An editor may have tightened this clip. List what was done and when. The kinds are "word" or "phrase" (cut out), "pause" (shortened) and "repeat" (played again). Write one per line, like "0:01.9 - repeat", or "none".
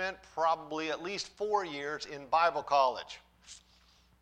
none